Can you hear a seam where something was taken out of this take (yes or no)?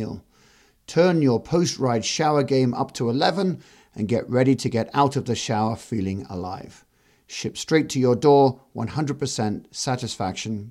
no